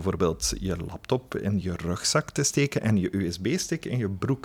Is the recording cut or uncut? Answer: uncut